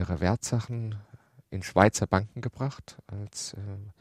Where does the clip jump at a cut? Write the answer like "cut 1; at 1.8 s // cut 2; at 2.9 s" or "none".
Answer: none